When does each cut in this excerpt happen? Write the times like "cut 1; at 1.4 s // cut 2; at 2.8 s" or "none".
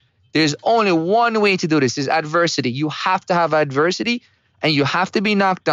none